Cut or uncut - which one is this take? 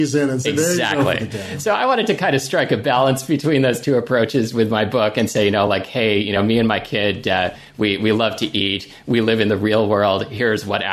uncut